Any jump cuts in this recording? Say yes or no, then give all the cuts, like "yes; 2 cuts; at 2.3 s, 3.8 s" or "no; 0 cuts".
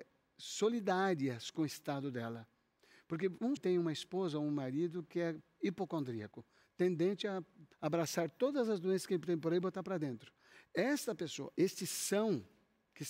yes; 2 cuts; at 3.6 s, 7.7 s